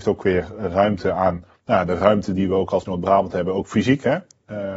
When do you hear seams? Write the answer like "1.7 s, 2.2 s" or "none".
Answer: 2.9 s